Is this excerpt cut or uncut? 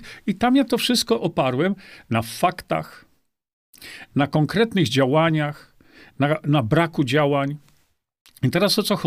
uncut